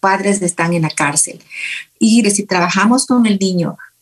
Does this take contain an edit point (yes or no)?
yes